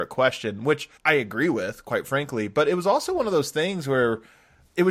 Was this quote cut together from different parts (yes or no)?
yes